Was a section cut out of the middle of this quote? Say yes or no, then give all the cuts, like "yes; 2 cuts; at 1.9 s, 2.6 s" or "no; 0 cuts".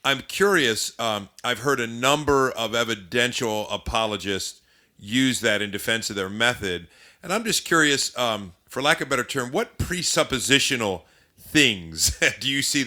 no; 0 cuts